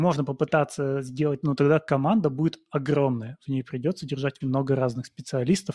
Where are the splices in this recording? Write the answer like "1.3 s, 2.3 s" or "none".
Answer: 1.4 s, 4.4 s